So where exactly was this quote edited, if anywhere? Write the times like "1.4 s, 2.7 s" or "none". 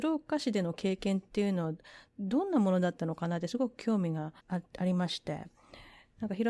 2.1 s, 4.4 s